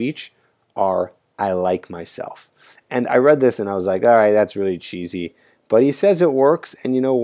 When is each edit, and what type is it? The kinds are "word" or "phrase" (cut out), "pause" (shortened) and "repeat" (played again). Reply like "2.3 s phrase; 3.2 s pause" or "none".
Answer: none